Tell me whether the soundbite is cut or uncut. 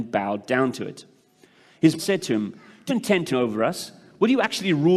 cut